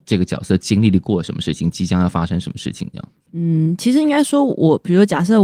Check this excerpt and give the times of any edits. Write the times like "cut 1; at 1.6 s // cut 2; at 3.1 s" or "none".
none